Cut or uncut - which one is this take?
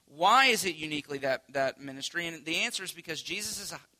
uncut